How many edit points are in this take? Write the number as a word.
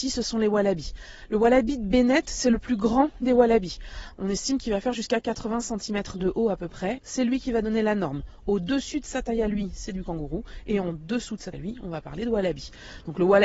two